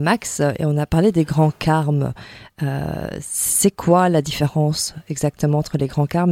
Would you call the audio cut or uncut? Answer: uncut